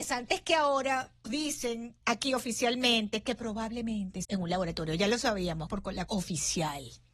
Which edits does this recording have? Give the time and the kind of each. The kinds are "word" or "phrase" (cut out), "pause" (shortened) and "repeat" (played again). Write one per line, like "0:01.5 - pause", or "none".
0:01.2 - word
0:02.0 - pause
0:04.2 - phrase
0:05.7 - word
0:06.1 - word